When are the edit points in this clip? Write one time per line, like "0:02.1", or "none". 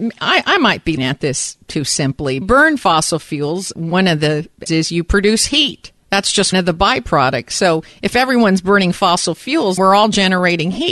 0:01.0
0:02.4
0:03.7
0:04.7
0:06.0
0:06.5
0:09.8

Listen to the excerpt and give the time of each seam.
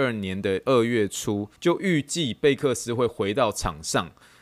0:01.6

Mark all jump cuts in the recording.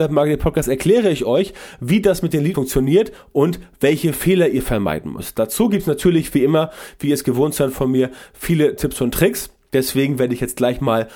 0:02.5

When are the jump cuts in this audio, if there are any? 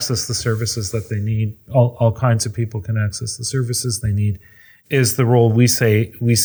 none

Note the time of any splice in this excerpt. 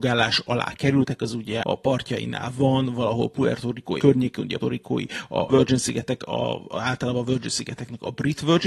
0:01.6
0:04.0
0:04.6
0:05.5

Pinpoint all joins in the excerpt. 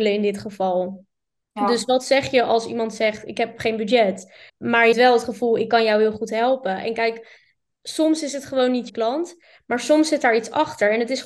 0:04.5
0:04.9
0:08.9

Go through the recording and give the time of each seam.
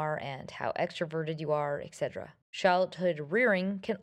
0:02.4

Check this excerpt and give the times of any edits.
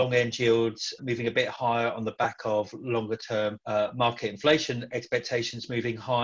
0:01.0
0:03.6

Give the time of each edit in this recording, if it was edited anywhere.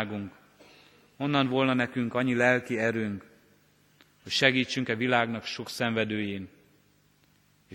none

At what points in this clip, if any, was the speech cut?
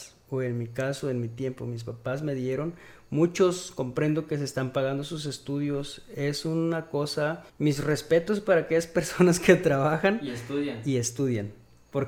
0:07.5

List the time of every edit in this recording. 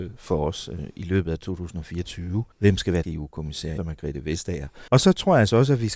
0:02.5
0:03.0
0:03.8
0:04.9

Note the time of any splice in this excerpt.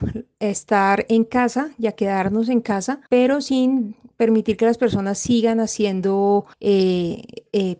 0:03.1
0:06.5

